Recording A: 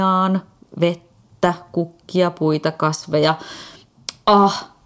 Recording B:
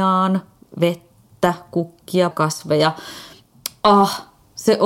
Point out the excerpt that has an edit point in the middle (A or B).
B